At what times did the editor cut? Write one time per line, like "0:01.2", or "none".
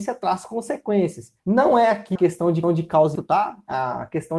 0:01.4
0:02.2
0:02.6
0:03.2

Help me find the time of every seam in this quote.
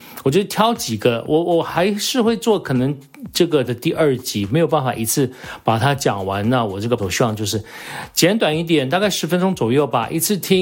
0:03.7
0:07.0

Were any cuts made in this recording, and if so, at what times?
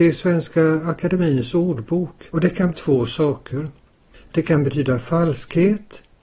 0:02.3
0:02.7

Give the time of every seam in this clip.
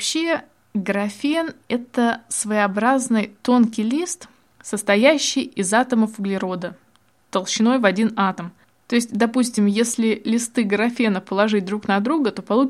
none

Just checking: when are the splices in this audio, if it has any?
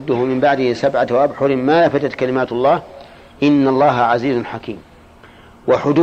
none

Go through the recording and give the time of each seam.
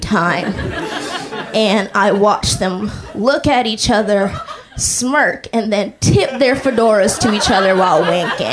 none

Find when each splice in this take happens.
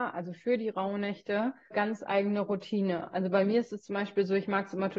0:01.7

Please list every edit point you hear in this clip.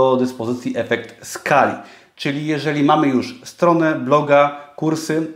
none

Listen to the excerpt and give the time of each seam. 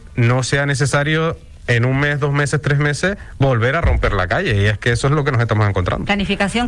none

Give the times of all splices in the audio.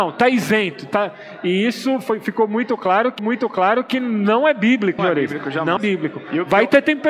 0:03.2
0:05.0
0:05.8

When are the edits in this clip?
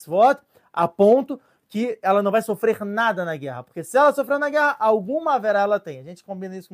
none

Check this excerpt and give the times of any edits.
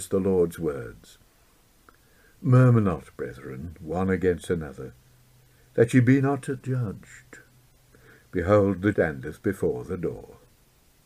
0:08.9

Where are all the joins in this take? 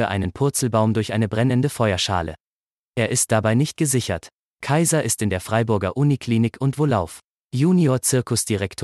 none

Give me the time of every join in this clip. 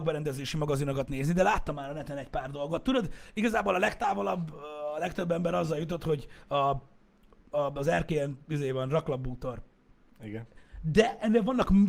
none

